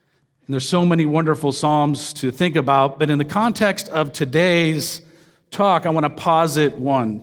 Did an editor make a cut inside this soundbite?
no; 0 cuts

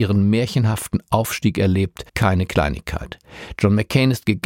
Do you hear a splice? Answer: yes; 1 cut; at 2.1 s

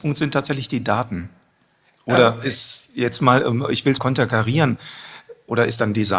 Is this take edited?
yes; 1 cut; at 4.0 s

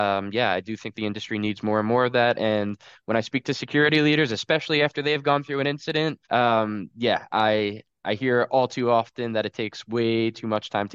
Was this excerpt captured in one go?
no; 1 cut; at 6.2 s

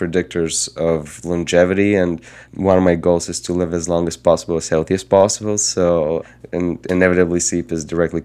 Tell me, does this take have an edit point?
no; 0 cuts

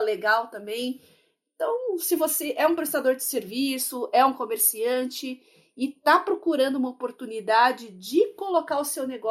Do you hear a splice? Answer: no; 0 cuts

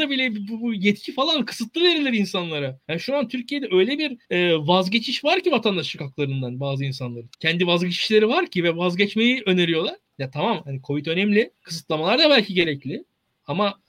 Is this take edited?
yes; 5 cuts; at 2.8 s, 4.2 s, 7.3 s, 10.1 s, 11.6 s

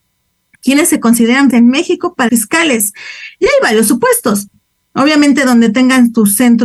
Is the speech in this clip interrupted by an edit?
yes; 2 cuts; at 1.5 s, 2.3 s

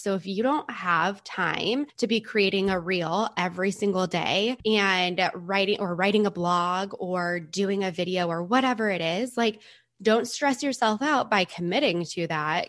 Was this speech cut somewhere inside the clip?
no; 0 cuts

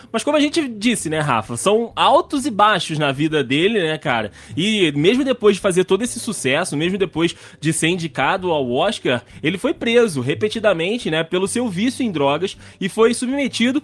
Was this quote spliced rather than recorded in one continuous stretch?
no; 0 cuts

